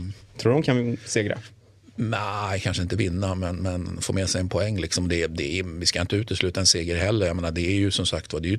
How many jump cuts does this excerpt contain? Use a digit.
0